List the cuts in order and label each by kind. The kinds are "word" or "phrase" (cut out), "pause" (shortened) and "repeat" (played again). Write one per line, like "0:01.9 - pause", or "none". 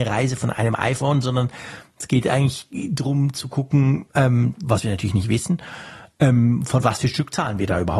none

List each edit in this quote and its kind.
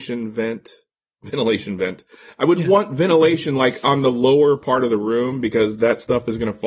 none

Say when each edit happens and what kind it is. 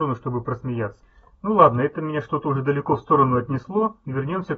none

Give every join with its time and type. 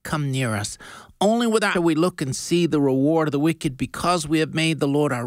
0:01.7 - phrase

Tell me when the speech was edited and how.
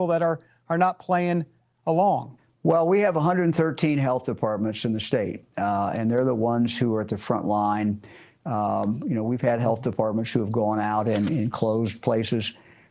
none

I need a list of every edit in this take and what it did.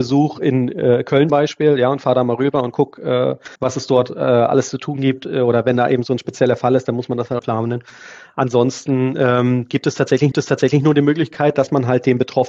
0:01.3 - word
0:03.5 - pause
0:07.4 - phrase
0:10.3 - repeat

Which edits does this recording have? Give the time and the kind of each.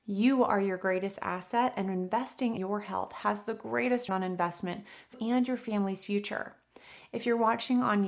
0:02.6 - word
0:04.1 - word
0:05.1 - word

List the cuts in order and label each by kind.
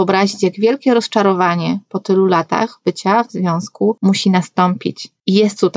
none

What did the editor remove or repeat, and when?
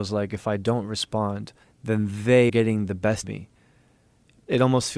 0:01.6 - pause
0:02.5 - word
0:03.2 - word

